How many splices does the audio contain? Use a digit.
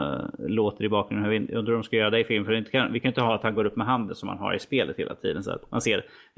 0